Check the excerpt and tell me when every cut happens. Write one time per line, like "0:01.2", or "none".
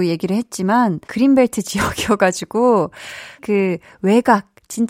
0:01.0
0:03.4